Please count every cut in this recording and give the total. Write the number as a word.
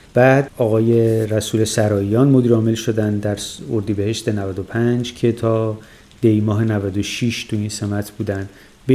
zero